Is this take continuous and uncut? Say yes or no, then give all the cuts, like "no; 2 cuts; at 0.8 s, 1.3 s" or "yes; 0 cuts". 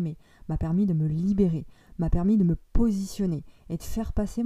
yes; 0 cuts